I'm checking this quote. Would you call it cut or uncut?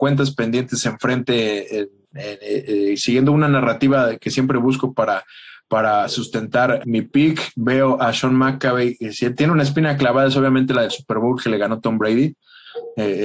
cut